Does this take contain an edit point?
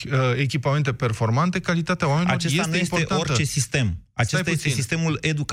no; 0 cuts

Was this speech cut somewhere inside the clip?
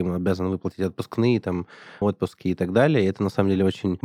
yes; 1 cut; at 2.0 s

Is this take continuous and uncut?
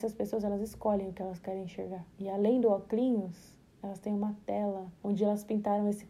no; 3 cuts; at 2.1 s, 3.6 s, 5.0 s

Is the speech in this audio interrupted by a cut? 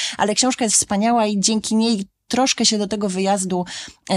no; 0 cuts

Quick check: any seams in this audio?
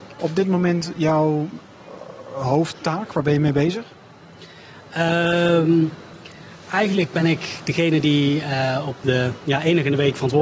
no; 0 cuts

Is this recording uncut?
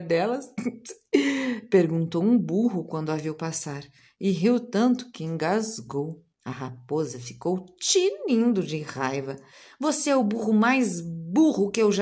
no; 1 cut; at 6.3 s

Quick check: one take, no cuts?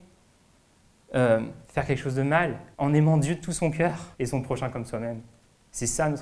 no; 3 cuts; at 1.6 s, 2.7 s, 4.1 s

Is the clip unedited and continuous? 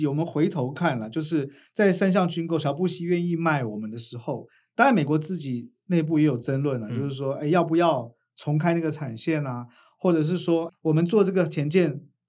no; 1 cut; at 10.7 s

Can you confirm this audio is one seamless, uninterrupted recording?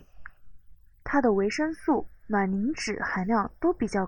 yes; 0 cuts

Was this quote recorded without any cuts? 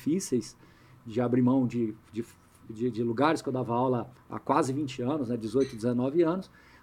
yes; 0 cuts

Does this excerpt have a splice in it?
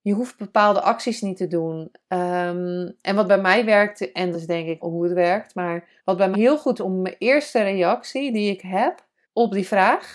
yes; 6 cuts; at 4.3 s, 4.8 s, 6.0 s, 6.3 s, 6.8 s, 9.2 s

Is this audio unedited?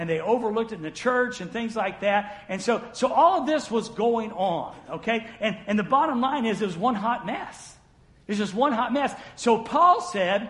yes; 0 cuts

